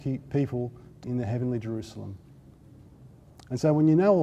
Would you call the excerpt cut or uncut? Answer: cut